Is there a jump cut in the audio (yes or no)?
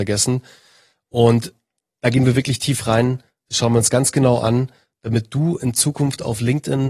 no